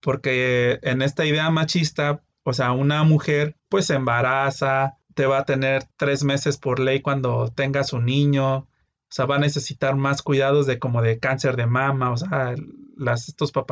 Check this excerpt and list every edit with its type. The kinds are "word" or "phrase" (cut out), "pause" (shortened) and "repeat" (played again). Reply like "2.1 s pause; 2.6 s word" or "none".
3.6 s pause; 5.9 s pause